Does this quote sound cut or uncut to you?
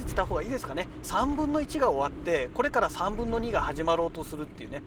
cut